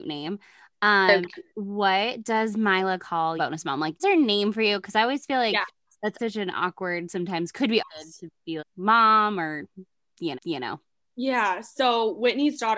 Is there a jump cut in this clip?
yes; 7 cuts; at 1.5 s, 3.4 s, 4.0 s, 6.2 s, 7.8 s, 8.6 s, 10.3 s

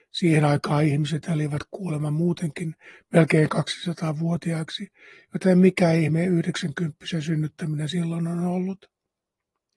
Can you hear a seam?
no; 0 cuts

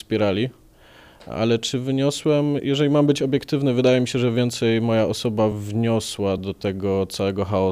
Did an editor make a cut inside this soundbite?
no; 0 cuts

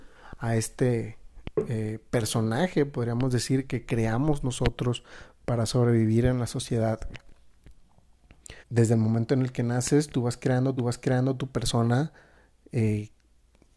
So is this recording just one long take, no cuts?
no; 2 cuts; at 8.6 s, 10.8 s

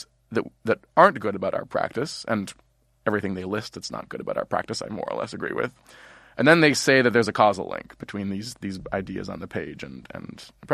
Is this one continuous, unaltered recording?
yes; 0 cuts

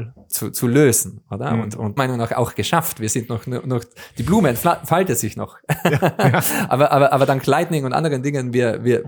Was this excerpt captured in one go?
no; 1 cut; at 2.0 s

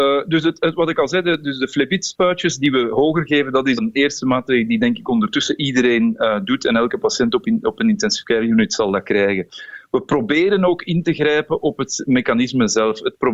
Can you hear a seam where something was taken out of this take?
yes; 1 cut; at 3.8 s

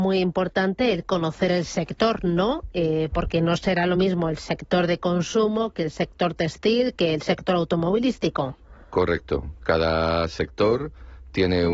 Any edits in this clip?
no; 0 cuts

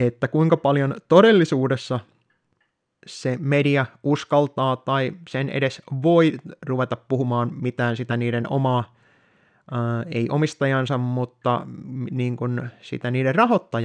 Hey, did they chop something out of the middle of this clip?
no; 0 cuts

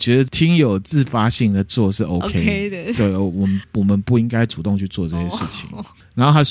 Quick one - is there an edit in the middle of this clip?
no; 0 cuts

